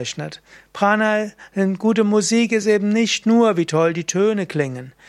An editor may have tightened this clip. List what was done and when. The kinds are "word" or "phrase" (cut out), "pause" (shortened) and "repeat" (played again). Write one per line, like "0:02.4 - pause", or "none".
none